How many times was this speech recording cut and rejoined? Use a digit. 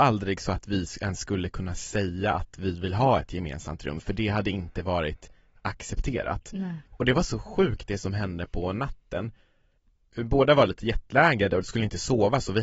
2